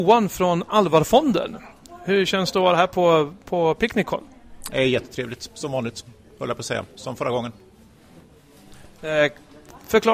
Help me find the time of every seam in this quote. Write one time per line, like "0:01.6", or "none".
none